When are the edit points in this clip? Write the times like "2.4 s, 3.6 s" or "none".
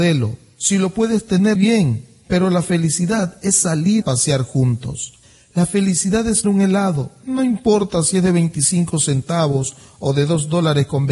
1.6 s, 4.0 s, 6.4 s